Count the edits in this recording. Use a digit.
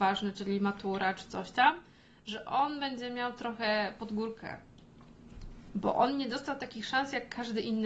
0